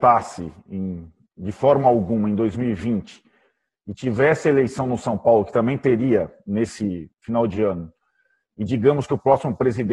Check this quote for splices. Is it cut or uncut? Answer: uncut